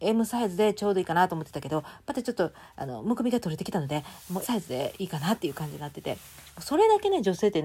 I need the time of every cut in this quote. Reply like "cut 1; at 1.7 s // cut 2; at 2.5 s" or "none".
cut 1; at 4.4 s